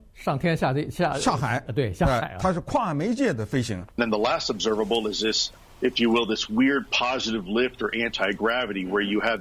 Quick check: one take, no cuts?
no; 1 cut; at 3.9 s

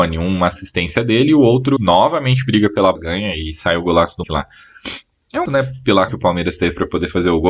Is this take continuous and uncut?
no; 5 cuts; at 1.8 s, 3.0 s, 4.2 s, 5.5 s, 6.1 s

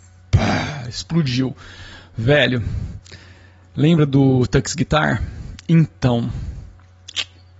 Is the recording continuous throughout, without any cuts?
yes; 0 cuts

